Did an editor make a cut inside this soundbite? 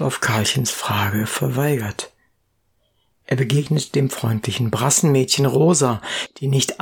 no; 0 cuts

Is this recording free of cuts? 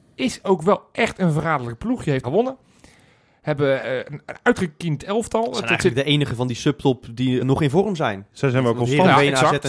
no; 3 cuts; at 2.2 s, 3.8 s, 7.4 s

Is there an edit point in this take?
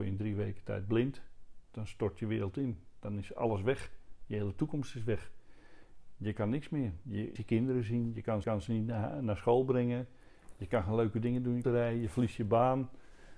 yes; 3 cuts; at 7.4 s, 8.4 s, 11.6 s

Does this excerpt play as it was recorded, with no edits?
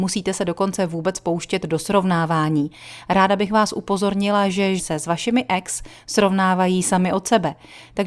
no; 1 cut; at 4.8 s

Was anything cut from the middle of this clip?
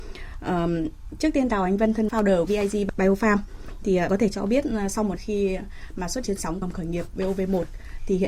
yes; 6 cuts; at 2.1 s, 2.5 s, 4.1 s, 5.2 s, 6.2 s, 6.6 s

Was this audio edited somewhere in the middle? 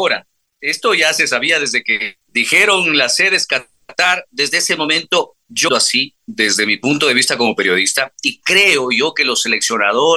yes; 2 cuts; at 2.2 s, 5.7 s

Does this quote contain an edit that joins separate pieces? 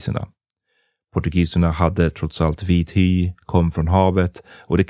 no; 0 cuts

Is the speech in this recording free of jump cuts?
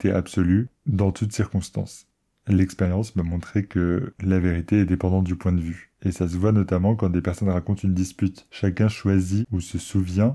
yes; 0 cuts

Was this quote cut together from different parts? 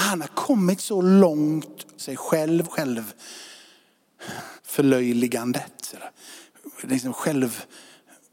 yes; 3 cuts; at 2.0 s, 2.7 s, 4.6 s

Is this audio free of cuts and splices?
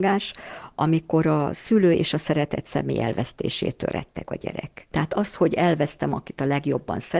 yes; 0 cuts

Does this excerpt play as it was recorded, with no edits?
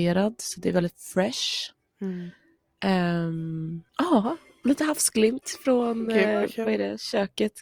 no; 1 cut; at 3.9 s

